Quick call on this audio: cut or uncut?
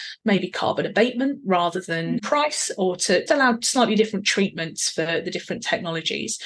cut